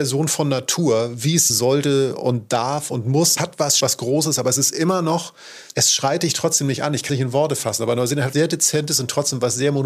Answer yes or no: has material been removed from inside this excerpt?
yes